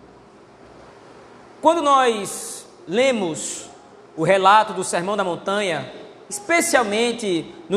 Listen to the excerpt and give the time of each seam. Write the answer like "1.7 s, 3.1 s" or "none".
none